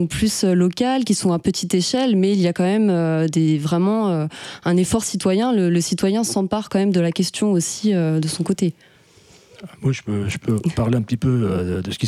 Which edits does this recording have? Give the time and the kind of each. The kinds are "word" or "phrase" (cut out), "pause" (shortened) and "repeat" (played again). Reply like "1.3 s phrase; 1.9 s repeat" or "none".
9.7 s pause